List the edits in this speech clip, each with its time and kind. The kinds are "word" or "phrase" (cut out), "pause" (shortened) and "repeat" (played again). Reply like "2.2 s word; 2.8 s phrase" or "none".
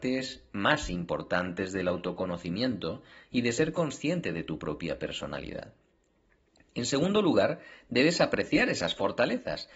none